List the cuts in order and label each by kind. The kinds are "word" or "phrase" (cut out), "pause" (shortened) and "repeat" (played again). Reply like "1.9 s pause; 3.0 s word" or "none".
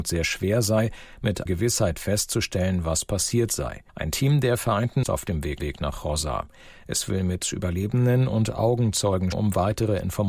1.5 s word; 3.9 s pause; 5.0 s phrase; 5.6 s repeat; 9.3 s word